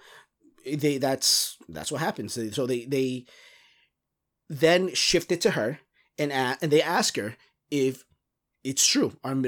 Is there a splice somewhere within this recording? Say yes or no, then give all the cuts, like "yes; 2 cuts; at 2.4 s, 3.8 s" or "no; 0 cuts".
no; 0 cuts